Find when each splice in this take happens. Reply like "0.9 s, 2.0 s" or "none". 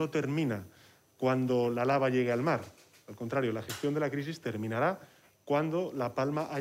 none

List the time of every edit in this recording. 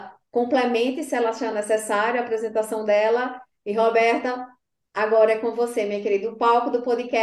none

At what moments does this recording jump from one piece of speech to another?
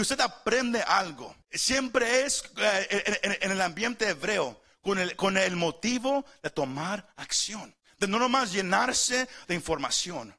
1.4 s, 7.8 s

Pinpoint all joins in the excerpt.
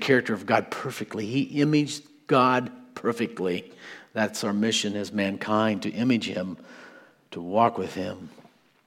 none

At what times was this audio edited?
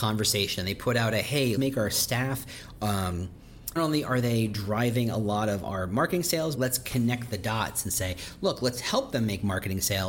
1.6 s, 3.8 s, 6.5 s

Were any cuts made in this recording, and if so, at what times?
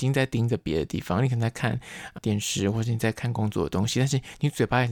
2.2 s

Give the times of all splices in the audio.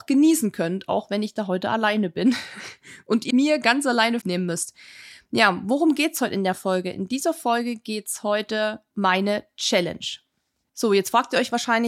3.3 s, 4.2 s, 8.9 s

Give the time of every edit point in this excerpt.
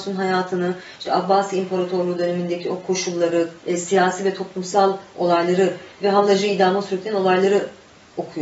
3.6 s, 5.9 s

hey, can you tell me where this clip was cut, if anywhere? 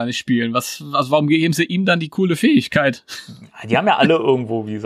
none

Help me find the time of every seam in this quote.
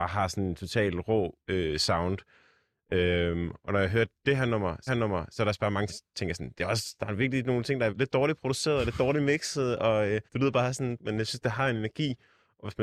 1.4 s, 4.9 s, 5.9 s, 7.9 s, 10.3 s, 11.0 s

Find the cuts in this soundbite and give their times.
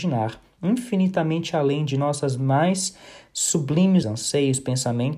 4.0 s

